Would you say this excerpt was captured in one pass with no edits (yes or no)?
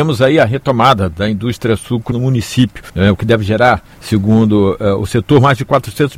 no